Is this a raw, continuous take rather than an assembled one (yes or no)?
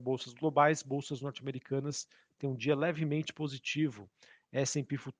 yes